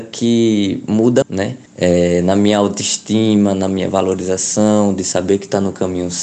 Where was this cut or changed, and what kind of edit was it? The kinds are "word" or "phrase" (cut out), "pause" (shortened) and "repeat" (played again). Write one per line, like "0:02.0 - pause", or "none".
0:01.2 - word
0:01.7 - pause